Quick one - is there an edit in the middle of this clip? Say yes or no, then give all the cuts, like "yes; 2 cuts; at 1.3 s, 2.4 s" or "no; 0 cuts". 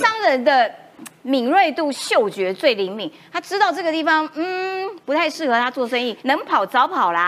yes; 1 cut; at 6.2 s